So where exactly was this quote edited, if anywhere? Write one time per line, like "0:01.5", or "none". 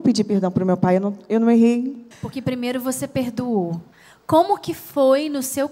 0:02.1
0:03.9

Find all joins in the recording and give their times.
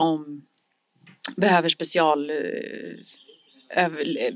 none

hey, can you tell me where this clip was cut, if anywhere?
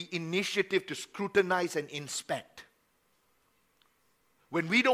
none

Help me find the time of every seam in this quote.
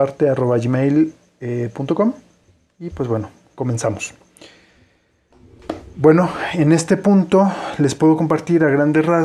none

